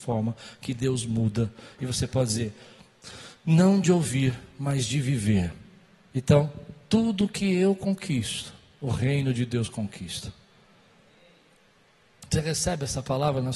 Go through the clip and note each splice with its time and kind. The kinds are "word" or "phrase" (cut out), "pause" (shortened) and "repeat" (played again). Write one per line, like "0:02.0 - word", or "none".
none